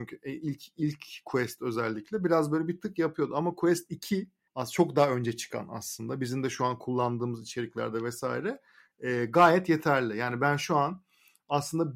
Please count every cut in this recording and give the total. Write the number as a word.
one